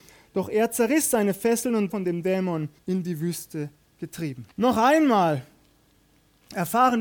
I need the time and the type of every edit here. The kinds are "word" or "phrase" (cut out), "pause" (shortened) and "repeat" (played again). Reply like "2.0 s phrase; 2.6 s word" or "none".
1.9 s word; 2.8 s pause; 4.5 s pause

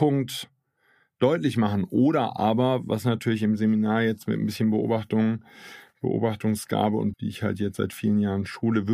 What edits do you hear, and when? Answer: 7.1 s word

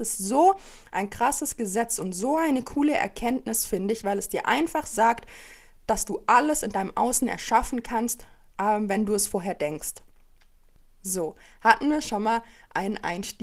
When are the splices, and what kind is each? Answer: none

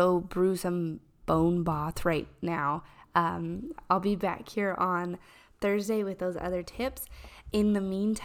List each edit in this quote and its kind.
none

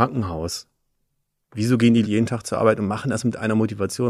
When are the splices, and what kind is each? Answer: 2.0 s word

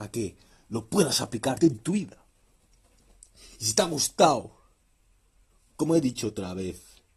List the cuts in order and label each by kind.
1.6 s word

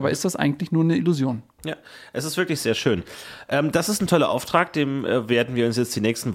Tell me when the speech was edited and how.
none

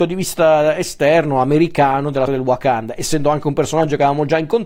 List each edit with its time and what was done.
2.3 s word

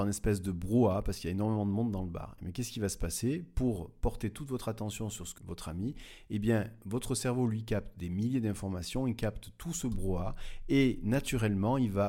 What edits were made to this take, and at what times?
5.4 s word

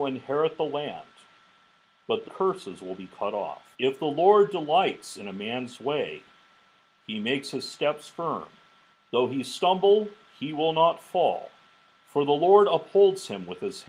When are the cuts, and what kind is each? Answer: 2.2 s phrase; 3.7 s pause; 8.9 s pause

